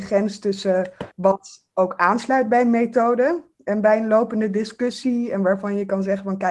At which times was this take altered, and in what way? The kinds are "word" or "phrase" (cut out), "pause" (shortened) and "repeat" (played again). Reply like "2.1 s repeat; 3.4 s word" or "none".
1.1 s pause